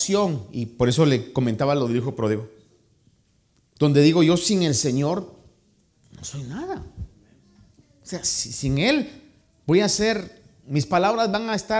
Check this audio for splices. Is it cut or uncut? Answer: uncut